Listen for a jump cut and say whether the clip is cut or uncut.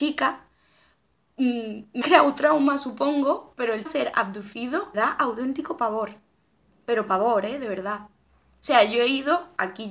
cut